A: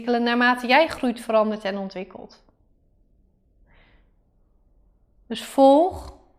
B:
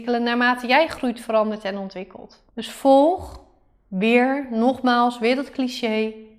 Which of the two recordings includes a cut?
B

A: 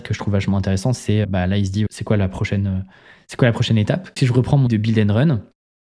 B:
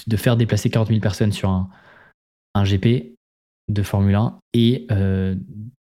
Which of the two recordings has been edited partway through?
A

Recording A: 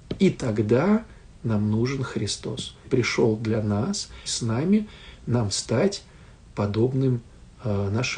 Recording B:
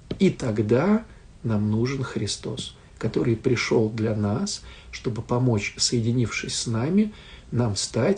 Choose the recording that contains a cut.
A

